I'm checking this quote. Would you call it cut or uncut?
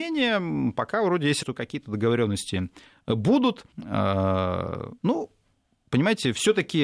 cut